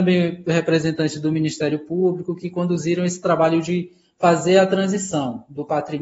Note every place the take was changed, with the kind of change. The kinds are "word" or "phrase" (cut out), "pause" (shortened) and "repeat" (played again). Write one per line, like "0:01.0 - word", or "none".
none